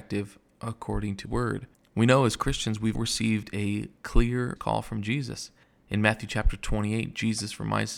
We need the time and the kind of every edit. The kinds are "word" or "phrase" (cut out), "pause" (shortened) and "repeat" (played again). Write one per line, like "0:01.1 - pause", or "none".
0:01.2 - word
0:01.7 - pause
0:02.9 - word
0:04.6 - phrase
0:05.6 - pause